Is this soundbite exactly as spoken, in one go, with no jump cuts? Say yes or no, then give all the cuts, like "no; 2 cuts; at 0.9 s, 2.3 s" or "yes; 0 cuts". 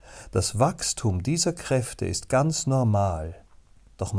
yes; 0 cuts